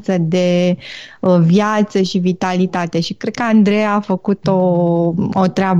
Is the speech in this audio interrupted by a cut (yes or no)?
no